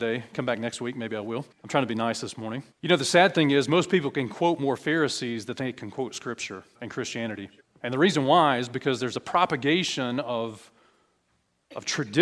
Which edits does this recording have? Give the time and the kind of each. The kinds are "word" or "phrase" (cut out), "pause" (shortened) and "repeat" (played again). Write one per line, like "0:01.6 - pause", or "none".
0:01.5 - pause
0:02.7 - pause
0:06.7 - pause
0:07.6 - pause